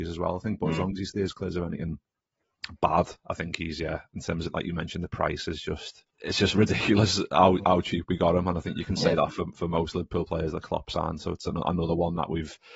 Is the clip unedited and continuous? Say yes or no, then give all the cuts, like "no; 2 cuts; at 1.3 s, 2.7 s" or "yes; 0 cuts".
no; 2 cuts; at 3.2 s, 6.1 s